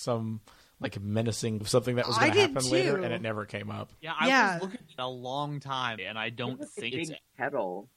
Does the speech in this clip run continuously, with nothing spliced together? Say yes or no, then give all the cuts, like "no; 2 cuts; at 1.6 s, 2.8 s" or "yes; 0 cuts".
no; 4 cuts; at 1.6 s, 5.0 s, 6.0 s, 6.9 s